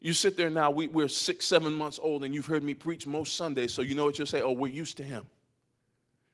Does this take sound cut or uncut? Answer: uncut